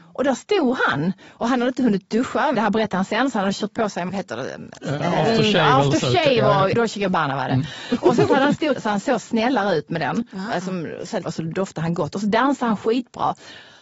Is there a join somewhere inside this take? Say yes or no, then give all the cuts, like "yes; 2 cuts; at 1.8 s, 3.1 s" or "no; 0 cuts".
yes; 5 cuts; at 2.5 s, 4.1 s, 6.7 s, 8.8 s, 11.3 s